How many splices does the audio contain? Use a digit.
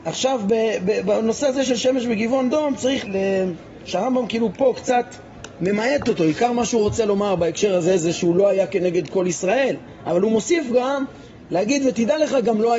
1